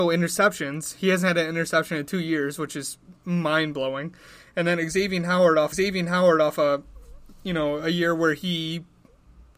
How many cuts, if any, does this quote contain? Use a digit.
1